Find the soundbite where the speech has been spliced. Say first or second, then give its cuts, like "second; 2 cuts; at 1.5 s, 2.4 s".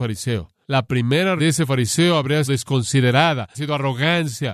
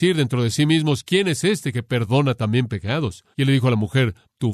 first; 3 cuts; at 1.4 s, 2.4 s, 3.5 s